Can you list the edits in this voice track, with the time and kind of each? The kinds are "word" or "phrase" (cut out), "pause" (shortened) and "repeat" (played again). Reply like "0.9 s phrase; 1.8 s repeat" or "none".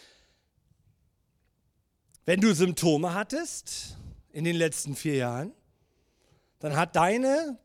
none